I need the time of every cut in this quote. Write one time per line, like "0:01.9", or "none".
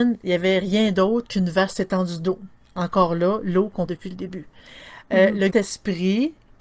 0:03.9
0:05.5